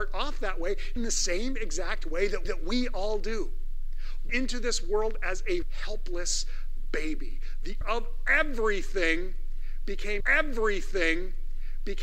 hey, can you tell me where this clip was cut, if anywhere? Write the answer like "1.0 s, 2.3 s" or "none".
1.0 s, 2.5 s, 4.3 s, 5.6 s, 7.8 s, 10.2 s